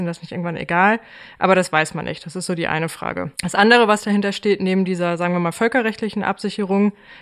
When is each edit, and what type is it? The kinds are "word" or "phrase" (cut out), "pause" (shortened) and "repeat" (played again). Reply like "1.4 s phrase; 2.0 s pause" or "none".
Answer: 3.3 s pause